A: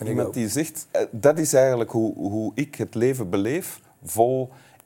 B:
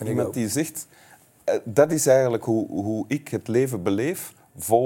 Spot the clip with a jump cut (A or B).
A